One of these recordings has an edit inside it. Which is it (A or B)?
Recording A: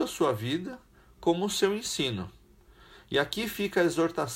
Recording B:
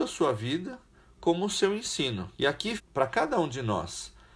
B